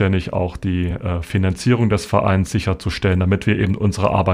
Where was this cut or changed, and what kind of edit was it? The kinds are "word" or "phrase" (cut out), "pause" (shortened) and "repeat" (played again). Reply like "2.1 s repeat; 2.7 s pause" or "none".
none